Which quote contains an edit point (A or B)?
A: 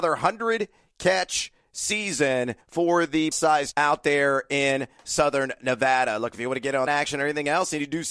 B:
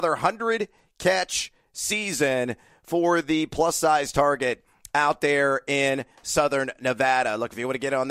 A